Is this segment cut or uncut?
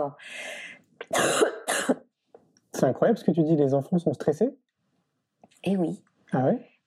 uncut